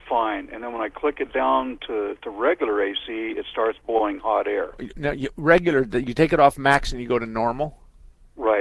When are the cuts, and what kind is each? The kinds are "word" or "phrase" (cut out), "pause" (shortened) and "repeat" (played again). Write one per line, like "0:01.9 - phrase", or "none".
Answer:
none